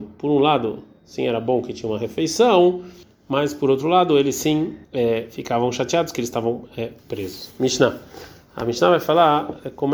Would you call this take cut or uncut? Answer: cut